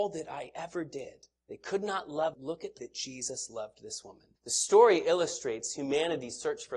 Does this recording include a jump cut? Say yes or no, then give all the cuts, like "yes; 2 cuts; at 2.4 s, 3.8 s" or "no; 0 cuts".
yes; 4 cuts; at 1.4 s, 2.3 s, 2.8 s, 4.4 s